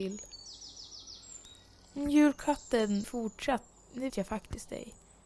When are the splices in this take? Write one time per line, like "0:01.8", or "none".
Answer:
0:03.0
0:04.1